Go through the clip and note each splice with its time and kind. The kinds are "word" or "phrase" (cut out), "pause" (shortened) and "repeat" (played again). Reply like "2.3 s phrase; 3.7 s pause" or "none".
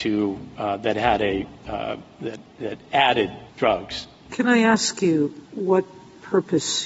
3.5 s pause; 5.5 s pause